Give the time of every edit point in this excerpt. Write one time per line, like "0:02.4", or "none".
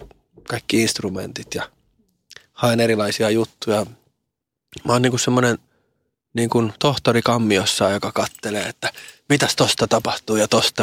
none